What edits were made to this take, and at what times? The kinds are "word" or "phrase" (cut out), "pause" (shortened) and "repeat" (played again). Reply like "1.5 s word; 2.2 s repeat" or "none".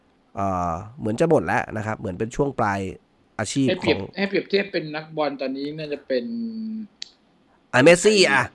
none